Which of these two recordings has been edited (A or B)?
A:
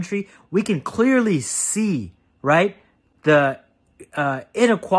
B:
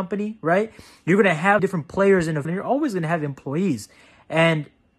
B